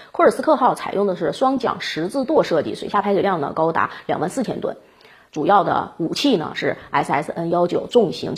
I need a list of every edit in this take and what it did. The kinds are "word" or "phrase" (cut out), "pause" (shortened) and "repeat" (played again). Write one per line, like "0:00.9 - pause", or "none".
none